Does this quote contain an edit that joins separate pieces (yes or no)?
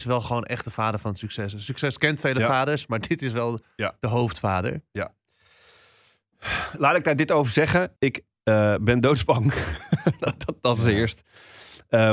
yes